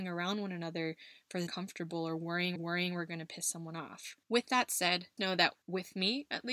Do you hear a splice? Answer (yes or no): yes